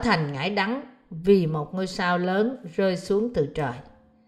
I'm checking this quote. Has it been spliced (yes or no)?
no